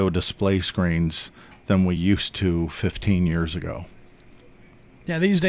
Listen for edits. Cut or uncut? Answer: uncut